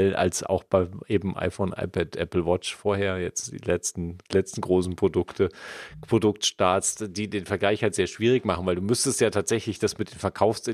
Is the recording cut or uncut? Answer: uncut